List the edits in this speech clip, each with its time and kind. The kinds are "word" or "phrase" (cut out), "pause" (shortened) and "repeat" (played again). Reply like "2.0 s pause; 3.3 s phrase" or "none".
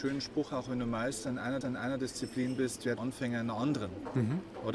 1.6 s repeat; 3.0 s word